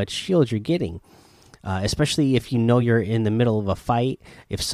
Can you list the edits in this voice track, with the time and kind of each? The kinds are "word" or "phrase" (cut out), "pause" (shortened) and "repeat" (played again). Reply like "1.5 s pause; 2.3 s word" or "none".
none